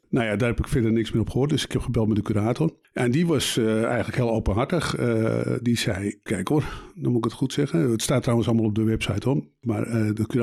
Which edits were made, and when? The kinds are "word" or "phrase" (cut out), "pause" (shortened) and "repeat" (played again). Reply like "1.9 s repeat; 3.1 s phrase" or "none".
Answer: 6.3 s word

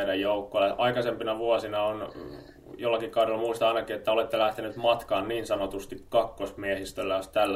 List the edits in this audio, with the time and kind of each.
none

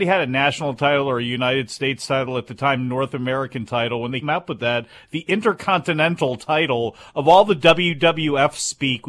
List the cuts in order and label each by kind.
4.2 s word

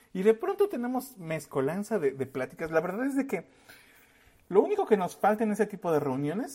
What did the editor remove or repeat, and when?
none

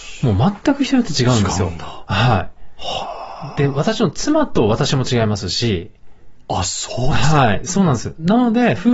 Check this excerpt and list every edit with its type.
none

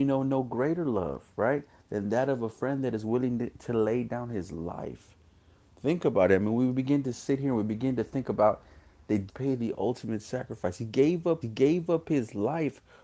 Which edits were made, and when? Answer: 9.3 s word; 11.4 s repeat

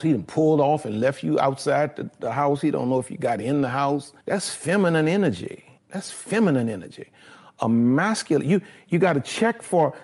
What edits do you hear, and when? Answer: 4.2 s pause; 5.8 s pause

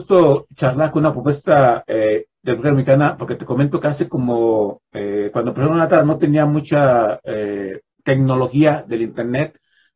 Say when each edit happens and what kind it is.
7.9 s pause

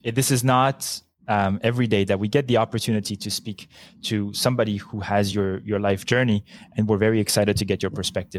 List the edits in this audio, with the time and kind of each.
none

